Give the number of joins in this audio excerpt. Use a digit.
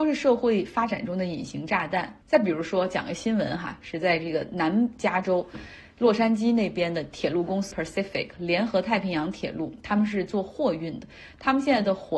2